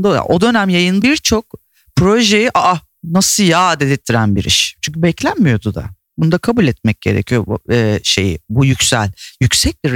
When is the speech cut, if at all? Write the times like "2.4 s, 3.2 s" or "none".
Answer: 1.0 s